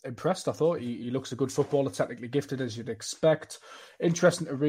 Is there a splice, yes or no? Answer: no